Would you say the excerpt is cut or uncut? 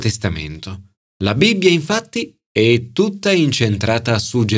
cut